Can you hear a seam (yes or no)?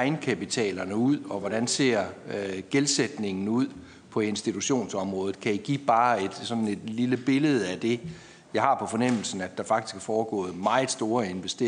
no